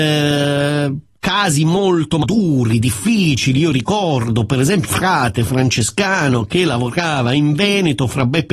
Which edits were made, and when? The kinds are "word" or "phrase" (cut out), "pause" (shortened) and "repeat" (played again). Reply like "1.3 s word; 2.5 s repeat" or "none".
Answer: 2.2 s word; 4.8 s word